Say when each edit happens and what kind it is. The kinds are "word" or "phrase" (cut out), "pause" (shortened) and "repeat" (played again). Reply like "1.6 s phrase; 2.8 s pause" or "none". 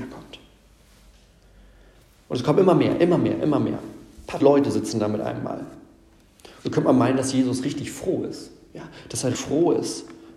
4.4 s word; 9.3 s word